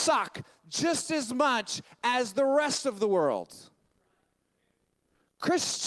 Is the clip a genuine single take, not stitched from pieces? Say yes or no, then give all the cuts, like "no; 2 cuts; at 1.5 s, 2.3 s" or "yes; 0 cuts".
yes; 0 cuts